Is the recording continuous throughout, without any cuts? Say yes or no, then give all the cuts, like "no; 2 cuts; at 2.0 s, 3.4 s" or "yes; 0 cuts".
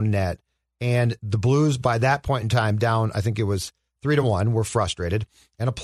yes; 0 cuts